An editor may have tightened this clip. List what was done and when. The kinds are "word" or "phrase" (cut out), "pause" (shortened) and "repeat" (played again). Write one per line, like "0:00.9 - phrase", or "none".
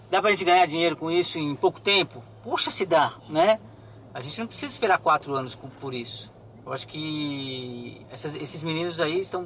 0:03.2 - pause
0:06.4 - pause
0:08.0 - pause